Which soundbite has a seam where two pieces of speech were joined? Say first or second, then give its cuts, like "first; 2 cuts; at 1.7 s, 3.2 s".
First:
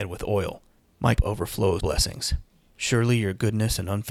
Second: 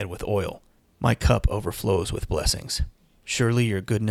first; 2 cuts; at 1.2 s, 1.8 s